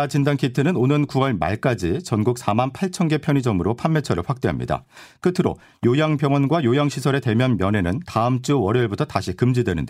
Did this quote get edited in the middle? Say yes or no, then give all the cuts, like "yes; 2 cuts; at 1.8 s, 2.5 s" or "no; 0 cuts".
no; 0 cuts